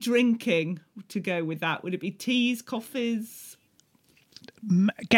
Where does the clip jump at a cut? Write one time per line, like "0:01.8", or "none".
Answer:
none